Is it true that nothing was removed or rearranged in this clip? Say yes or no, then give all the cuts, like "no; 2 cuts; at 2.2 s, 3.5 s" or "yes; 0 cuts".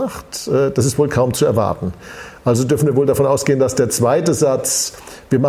yes; 0 cuts